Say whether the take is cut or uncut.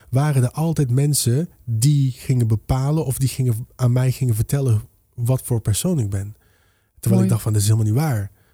uncut